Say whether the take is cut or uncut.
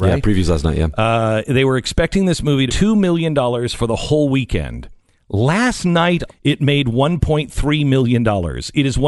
cut